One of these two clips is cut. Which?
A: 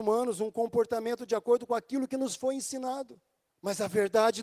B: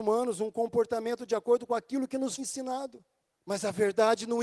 B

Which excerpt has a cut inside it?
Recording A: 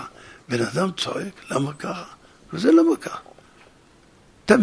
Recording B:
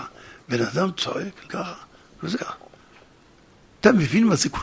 B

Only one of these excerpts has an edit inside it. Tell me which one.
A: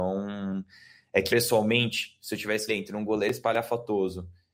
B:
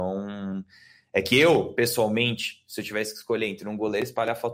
A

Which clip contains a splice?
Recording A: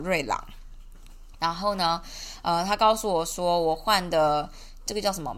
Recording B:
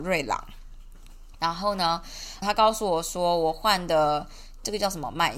B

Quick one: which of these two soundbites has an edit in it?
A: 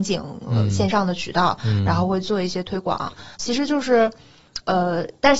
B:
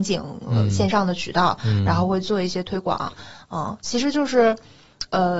A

